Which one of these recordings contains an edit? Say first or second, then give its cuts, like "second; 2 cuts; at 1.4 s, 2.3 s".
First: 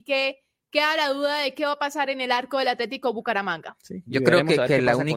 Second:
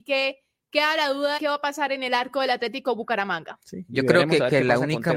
second; 1 cut; at 1.4 s